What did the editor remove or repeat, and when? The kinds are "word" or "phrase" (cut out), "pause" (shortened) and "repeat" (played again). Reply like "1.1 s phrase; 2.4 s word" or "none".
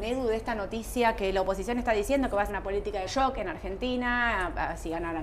2.5 s word; 3.1 s word